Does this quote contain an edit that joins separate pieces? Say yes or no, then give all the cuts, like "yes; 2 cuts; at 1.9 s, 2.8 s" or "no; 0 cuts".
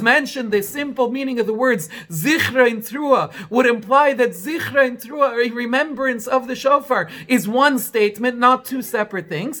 no; 0 cuts